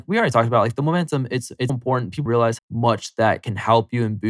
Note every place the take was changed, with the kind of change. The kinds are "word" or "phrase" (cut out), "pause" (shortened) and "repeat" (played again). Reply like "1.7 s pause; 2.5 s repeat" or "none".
1.7 s word; 2.3 s word; 2.6 s word